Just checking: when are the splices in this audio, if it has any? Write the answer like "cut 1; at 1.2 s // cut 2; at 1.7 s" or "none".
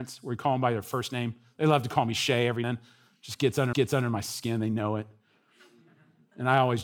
cut 1; at 2.6 s // cut 2; at 3.7 s